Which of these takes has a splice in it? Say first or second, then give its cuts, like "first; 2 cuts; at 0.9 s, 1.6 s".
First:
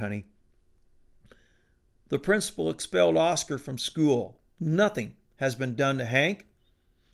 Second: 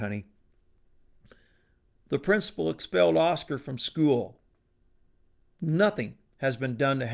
first; 1 cut; at 4.5 s